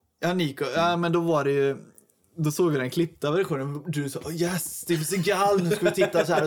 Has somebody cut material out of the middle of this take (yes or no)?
no